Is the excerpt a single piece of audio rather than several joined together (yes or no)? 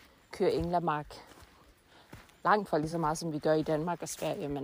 yes